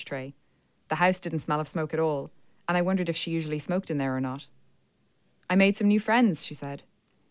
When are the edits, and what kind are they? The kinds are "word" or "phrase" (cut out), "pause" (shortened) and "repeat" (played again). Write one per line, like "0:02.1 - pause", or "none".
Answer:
none